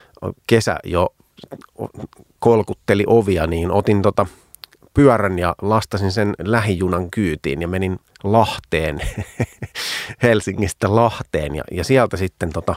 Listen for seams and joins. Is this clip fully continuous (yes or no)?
yes